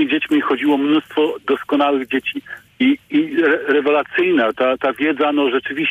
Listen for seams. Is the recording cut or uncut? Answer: uncut